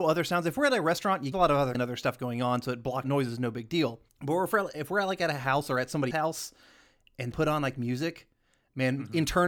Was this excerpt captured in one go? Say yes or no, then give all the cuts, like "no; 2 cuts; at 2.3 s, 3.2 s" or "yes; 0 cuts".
no; 6 cuts; at 1.3 s, 1.7 s, 3.0 s, 4.1 s, 6.1 s, 7.3 s